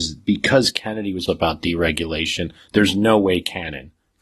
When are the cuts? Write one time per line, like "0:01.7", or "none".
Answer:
0:01.3

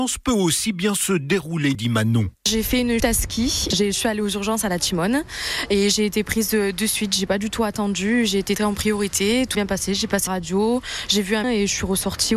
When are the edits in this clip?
0:01.7
0:03.0
0:08.6
0:09.5
0:10.3
0:11.4

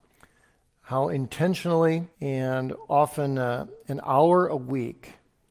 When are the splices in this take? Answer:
0:02.1

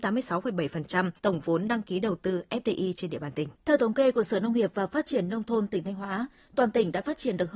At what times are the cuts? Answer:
0:01.2
0:03.6

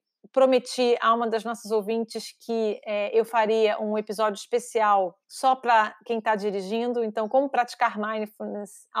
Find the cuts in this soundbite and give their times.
0:05.2

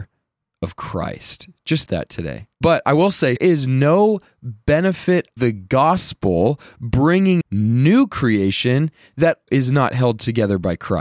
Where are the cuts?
0:01.9
0:02.5
0:03.4
0:05.4
0:07.4
0:09.5

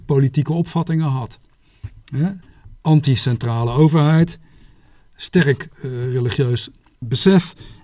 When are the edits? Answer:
0:05.7

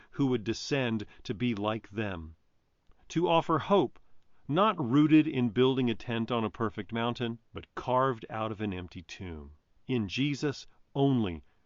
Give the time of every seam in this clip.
0:07.4
0:09.7

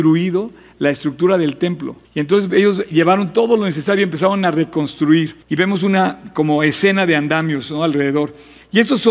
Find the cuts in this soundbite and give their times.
0:02.0
0:05.4

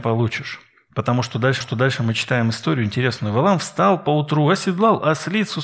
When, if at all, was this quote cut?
0:01.6

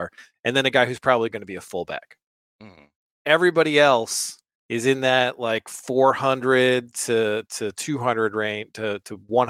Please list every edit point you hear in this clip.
none

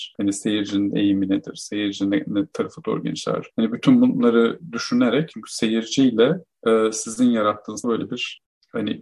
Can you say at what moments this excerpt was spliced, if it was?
0:05.3
0:07.8

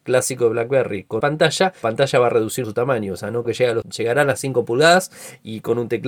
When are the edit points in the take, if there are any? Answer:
0:01.2
0:01.8
0:02.6
0:03.4
0:03.8

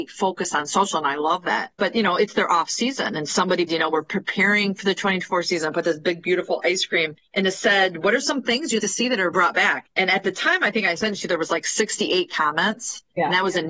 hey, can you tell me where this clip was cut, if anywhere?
0:03.7
0:08.8
0:09.3

